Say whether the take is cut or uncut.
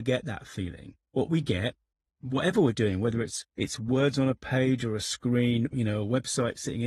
cut